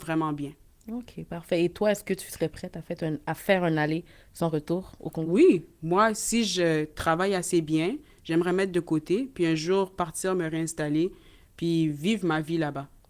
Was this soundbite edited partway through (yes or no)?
no